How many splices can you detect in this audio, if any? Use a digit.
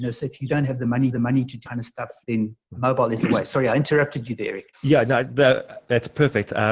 4